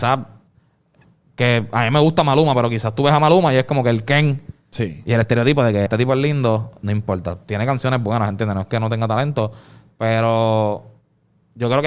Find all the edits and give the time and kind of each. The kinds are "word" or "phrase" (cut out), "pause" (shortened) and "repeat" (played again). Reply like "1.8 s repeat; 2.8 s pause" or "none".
5.9 s word